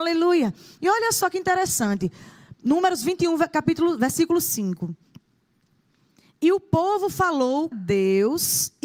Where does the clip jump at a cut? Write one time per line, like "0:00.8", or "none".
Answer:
0:07.7